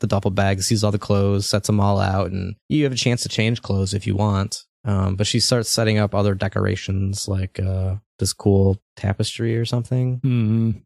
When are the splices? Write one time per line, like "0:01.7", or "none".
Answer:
0:02.6
0:04.7
0:08.1

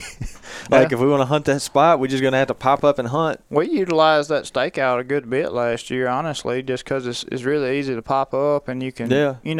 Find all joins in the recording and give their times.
none

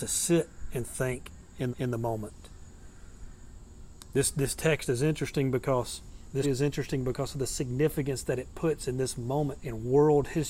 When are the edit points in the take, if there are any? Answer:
0:01.7
0:06.4
0:09.6

